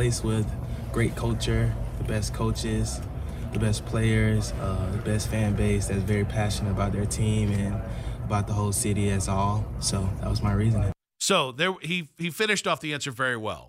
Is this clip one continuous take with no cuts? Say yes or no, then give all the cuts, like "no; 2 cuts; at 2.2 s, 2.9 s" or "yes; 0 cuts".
yes; 0 cuts